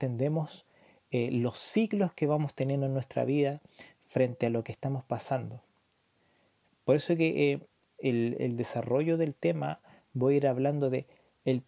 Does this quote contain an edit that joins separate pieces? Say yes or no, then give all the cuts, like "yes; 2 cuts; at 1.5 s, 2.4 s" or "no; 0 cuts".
no; 0 cuts